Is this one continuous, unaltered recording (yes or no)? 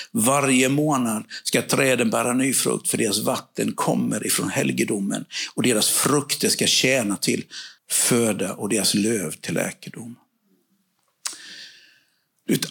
no